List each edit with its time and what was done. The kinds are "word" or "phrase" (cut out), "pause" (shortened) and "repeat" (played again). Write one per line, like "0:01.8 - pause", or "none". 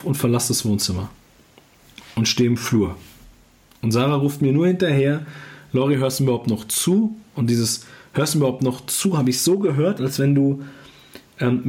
none